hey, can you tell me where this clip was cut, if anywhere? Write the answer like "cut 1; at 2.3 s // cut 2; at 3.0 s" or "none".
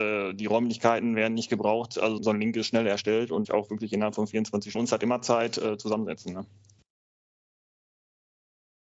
cut 1; at 2.2 s // cut 2; at 3.4 s // cut 3; at 4.7 s